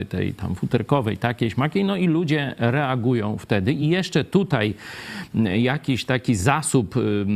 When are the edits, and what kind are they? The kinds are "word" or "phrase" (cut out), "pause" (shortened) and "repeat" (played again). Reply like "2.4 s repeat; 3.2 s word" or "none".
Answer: none